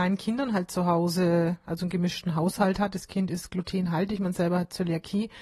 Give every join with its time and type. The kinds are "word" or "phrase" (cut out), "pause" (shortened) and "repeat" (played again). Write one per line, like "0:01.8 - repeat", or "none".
none

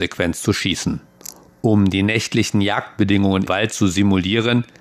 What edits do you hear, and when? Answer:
0:03.5 - word

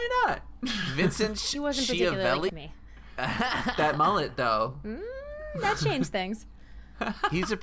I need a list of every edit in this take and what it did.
0:02.5 - phrase

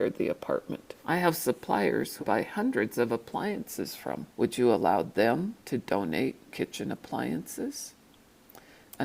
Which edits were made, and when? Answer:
0:01.0 - pause
0:02.2 - word
0:04.3 - pause
0:05.6 - pause
0:06.5 - word

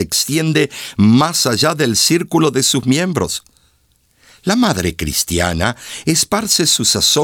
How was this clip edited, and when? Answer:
none

